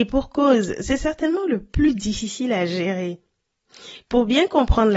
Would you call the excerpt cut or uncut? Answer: uncut